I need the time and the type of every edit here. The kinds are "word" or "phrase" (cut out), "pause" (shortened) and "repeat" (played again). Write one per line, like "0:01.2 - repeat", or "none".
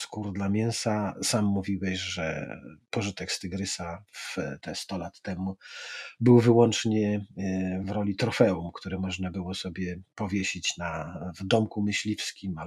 none

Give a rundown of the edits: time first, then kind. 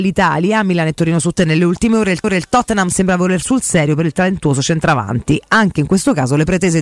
0:01.4 - word
0:02.2 - repeat
0:03.4 - word

